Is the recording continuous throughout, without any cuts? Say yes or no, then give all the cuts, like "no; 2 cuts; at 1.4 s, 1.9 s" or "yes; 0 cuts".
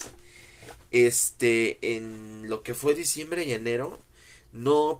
yes; 0 cuts